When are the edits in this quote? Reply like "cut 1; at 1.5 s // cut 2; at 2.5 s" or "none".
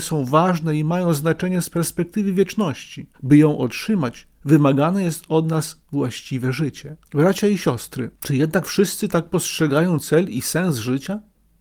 cut 1; at 3.1 s // cut 2; at 4.3 s // cut 3; at 5.8 s // cut 4; at 7.0 s // cut 5; at 8.1 s